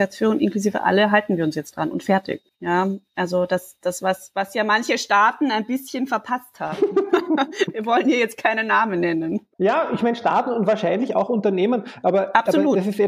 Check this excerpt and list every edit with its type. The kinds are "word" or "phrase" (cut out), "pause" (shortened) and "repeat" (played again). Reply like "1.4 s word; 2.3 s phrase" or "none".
2.5 s pause; 9.5 s pause

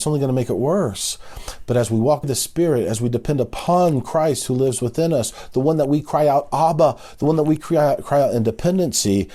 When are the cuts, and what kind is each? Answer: 2.2 s word

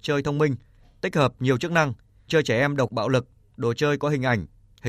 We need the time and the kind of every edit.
2.3 s word; 2.9 s phrase

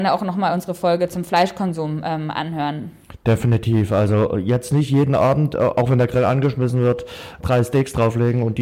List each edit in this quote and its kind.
none

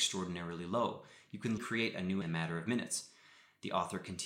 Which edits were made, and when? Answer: 1.6 s word; 2.2 s word

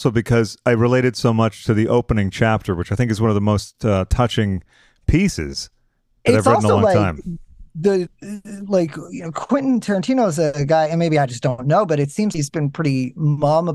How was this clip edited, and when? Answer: 12.3 s word

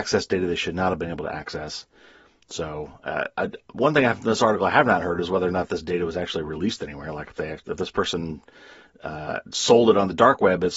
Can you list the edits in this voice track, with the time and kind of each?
none

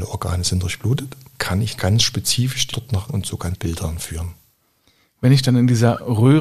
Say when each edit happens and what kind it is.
1.3 s word; 1.8 s word; 2.7 s word; 3.1 s word; 3.5 s word

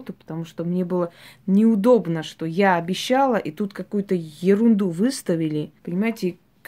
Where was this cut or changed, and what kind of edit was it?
5.8 s pause

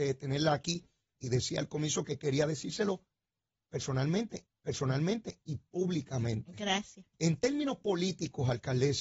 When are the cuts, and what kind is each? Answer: 4.5 s repeat; 7.1 s pause

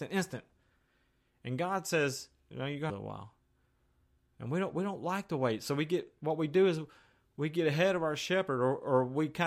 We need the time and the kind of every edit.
2.5 s word; 2.9 s phrase

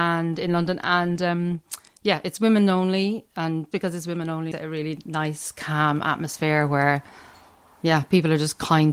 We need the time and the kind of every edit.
3.7 s word; 4.5 s word

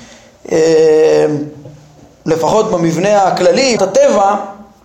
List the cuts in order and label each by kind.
3.8 s word

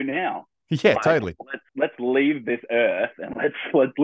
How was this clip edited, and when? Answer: 1.7 s pause

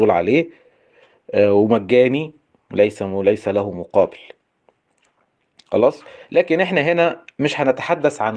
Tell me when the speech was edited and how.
none

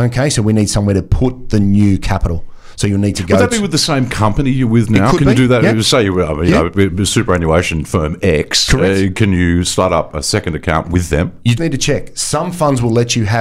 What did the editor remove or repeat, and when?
11.6 s word

